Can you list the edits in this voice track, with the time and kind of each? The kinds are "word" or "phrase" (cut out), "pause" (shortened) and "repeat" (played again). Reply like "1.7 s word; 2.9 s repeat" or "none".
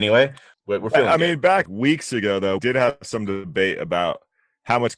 1.7 s phrase; 2.6 s word

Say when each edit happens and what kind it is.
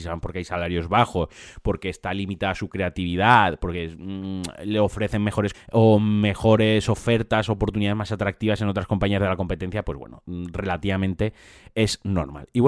5.5 s word

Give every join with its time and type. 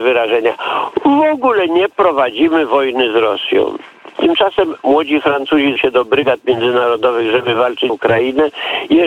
5.8 s word; 7.9 s word

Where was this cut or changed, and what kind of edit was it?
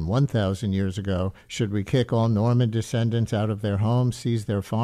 1.4 s pause

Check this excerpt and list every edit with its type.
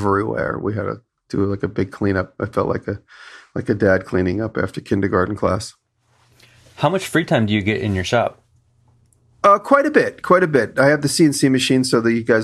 none

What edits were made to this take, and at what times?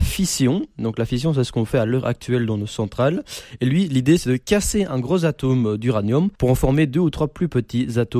6.4 s pause

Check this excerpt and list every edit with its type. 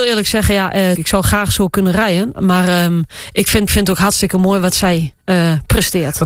1.0 s word; 3.7 s word

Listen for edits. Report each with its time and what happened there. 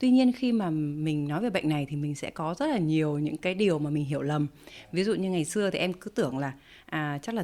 none

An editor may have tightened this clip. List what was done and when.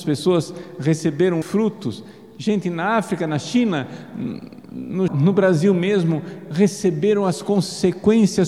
1.4 s word; 5.1 s phrase

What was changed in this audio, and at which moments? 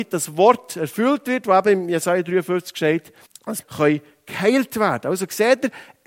3.3 s word; 3.6 s word

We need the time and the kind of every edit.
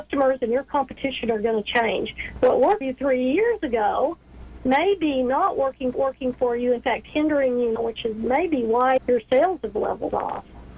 2.8 s word; 5.9 s repeat; 7.8 s word; 9.0 s word

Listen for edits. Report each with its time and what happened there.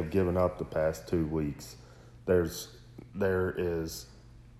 none

